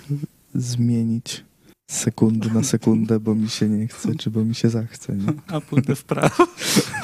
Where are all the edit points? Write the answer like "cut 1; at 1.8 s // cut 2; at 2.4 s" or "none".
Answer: cut 1; at 1.7 s